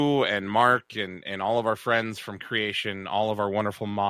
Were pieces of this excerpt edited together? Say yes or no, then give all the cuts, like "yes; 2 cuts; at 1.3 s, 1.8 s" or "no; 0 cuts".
yes; 1 cut; at 2.4 s